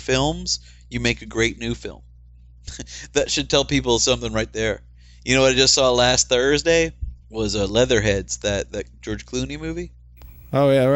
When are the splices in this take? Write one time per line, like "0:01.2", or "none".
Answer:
0:07.2